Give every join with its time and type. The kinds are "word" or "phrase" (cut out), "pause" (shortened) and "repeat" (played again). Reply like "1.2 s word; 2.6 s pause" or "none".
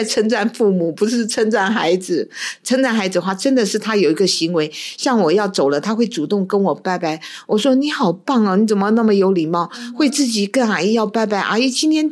none